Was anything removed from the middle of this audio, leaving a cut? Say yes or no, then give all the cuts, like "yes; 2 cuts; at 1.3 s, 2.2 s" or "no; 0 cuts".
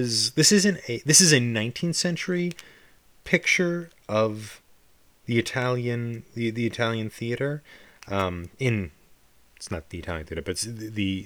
no; 0 cuts